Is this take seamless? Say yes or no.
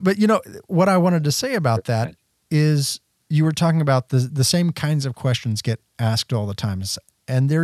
yes